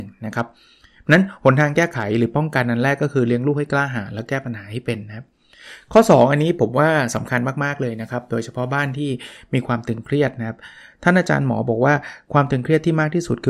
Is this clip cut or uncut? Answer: uncut